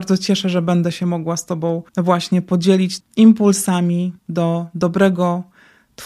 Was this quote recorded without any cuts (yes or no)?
no